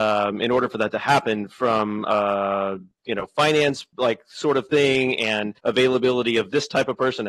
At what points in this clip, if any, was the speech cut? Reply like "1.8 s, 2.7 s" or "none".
3.9 s, 5.6 s